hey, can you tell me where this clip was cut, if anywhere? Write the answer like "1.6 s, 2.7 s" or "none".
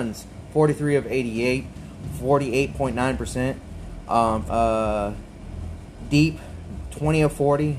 4.5 s